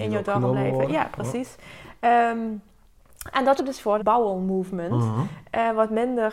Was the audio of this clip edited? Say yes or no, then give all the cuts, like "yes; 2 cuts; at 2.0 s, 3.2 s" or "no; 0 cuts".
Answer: yes; 2 cuts; at 3.6 s, 4.0 s